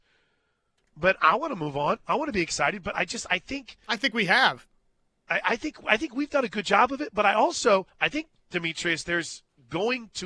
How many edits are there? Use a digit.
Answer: 1